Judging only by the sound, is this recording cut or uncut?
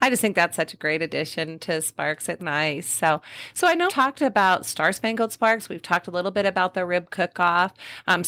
cut